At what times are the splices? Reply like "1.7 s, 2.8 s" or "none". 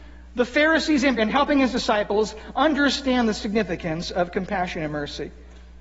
1.2 s